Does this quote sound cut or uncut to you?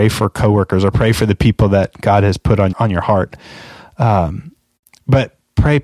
cut